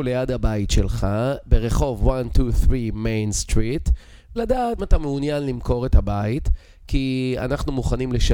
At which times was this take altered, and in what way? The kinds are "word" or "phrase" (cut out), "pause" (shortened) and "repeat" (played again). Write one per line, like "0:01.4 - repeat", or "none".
0:04.4 - word
0:04.8 - word

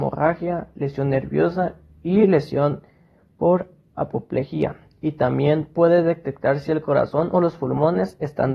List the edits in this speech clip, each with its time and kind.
none

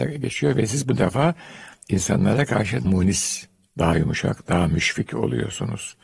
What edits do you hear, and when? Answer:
0:02.8 - word
0:03.7 - pause

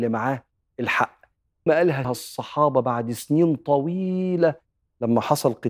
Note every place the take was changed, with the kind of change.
0:01.7 - word
0:02.0 - phrase

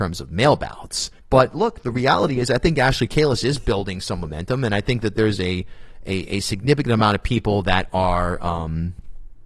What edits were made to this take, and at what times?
0:01.2 - pause

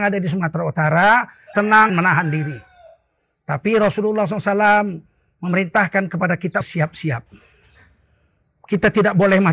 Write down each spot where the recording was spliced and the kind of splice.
0:01.5 - word
0:01.9 - word
0:06.6 - word

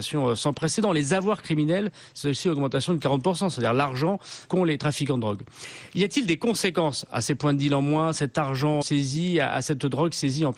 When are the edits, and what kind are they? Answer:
0:04.4 - word
0:08.8 - word

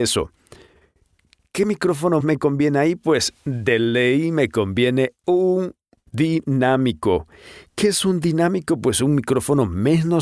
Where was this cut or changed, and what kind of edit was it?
0:02.2 - word

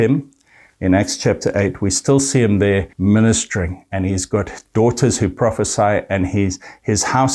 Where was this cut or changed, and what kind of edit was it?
0:02.9 - pause

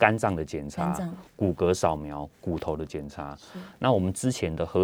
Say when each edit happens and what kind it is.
0:01.3 - pause

